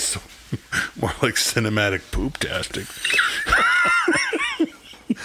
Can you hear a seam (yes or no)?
no